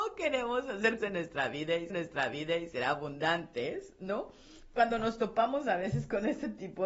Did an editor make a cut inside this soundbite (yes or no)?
yes